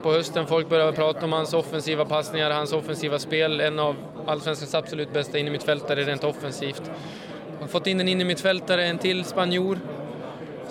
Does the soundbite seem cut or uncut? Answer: uncut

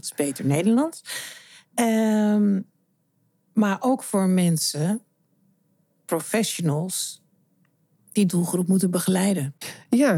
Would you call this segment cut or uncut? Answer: cut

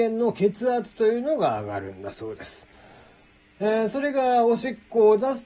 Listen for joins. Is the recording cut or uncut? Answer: uncut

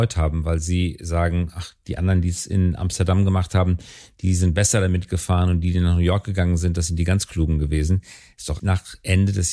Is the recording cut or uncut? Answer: cut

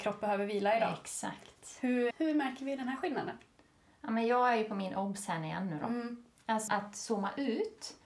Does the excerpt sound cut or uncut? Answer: cut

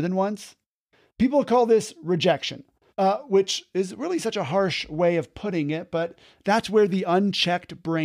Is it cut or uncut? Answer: cut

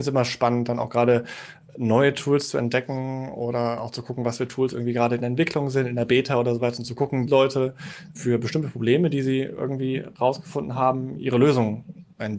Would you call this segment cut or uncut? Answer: cut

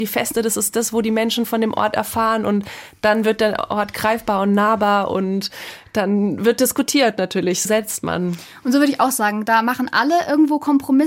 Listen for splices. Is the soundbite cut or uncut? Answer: cut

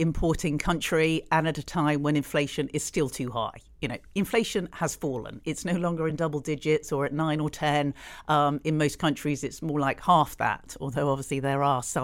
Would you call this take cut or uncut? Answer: uncut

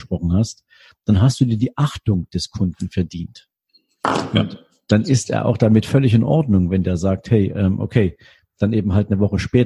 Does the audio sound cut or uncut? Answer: uncut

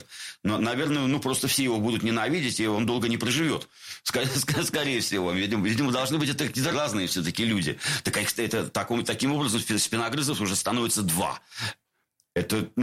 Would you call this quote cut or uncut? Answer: cut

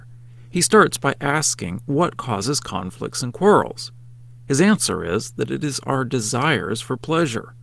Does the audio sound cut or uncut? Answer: uncut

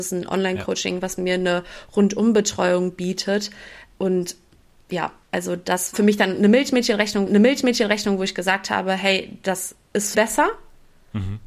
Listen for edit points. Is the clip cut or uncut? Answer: cut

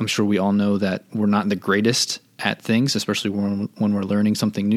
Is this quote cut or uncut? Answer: uncut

